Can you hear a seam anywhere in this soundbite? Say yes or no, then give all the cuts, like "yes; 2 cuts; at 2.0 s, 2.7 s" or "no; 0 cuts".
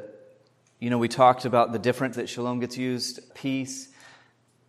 yes; 2 cuts; at 2.1 s, 3.3 s